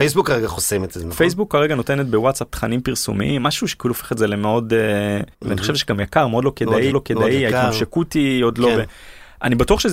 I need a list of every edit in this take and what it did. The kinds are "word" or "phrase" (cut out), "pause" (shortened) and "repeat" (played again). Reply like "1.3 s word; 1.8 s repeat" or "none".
2.5 s word; 5.3 s pause; 6.9 s repeat